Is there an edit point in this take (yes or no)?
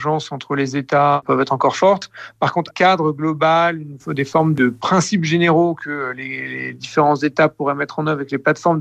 yes